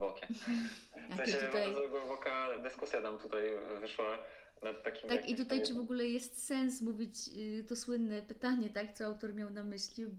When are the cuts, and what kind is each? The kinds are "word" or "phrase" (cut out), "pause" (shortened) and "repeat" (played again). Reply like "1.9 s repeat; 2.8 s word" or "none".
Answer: none